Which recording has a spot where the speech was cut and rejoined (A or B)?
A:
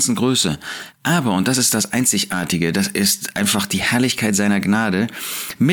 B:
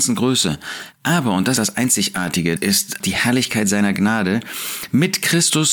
B